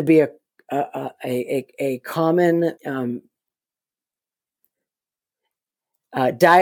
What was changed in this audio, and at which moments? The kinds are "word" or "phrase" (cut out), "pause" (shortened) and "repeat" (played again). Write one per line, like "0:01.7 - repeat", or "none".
0:02.8 - pause